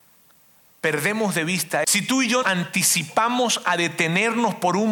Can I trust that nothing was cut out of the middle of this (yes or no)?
no